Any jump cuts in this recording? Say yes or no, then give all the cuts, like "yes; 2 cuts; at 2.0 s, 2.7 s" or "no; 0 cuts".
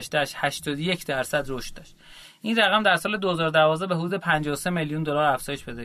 no; 0 cuts